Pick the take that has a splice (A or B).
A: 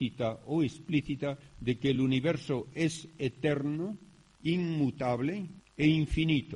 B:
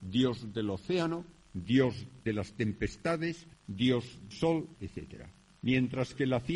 B